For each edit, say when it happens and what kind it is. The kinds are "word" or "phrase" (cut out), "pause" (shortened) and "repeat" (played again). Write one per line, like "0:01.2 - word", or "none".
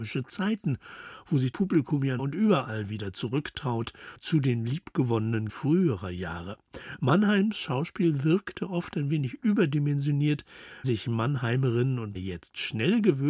0:01.5 - word
0:02.2 - phrase
0:05.5 - word
0:10.8 - word
0:12.1 - word